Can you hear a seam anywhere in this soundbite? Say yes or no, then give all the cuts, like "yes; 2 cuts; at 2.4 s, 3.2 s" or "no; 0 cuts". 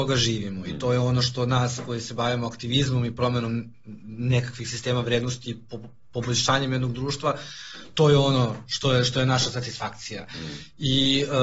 no; 0 cuts